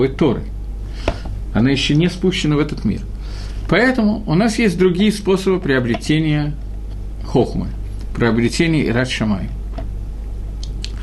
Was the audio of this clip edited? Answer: no; 0 cuts

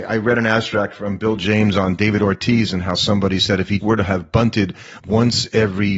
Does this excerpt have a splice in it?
yes; 2 cuts; at 3.8 s, 5.0 s

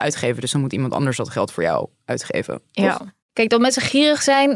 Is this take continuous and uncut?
no; 1 cut; at 3.2 s

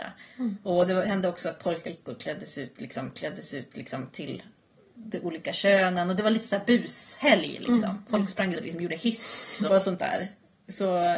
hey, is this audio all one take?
no; 4 cuts; at 1.9 s, 3.1 s, 8.5 s, 9.7 s

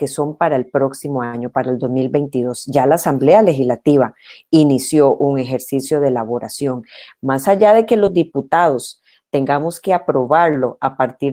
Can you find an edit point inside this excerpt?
no; 0 cuts

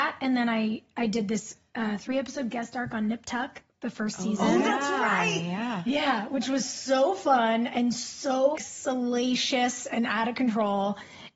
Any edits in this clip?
yes; 1 cut; at 8.5 s

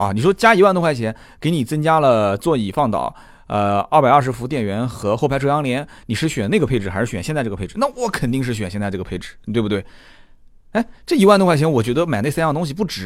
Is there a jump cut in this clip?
no; 0 cuts

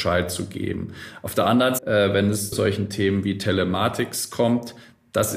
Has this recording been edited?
yes; 2 cuts; at 1.8 s, 2.5 s

